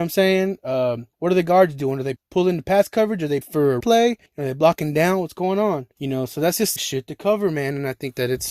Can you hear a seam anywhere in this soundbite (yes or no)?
yes